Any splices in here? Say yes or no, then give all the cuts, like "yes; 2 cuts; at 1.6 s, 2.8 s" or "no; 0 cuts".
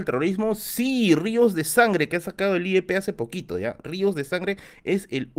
no; 0 cuts